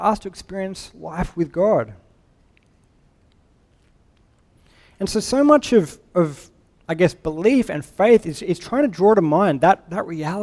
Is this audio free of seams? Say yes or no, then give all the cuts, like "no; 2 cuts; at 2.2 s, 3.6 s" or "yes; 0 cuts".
yes; 0 cuts